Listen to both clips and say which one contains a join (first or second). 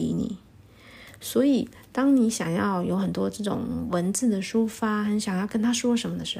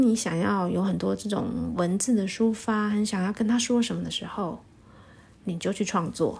first